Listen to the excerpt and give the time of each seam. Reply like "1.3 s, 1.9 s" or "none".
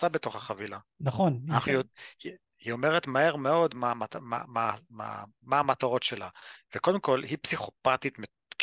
none